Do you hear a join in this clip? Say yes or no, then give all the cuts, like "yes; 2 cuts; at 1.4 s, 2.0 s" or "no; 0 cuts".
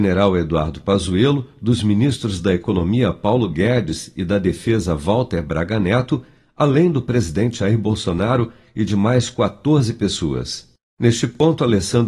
no; 0 cuts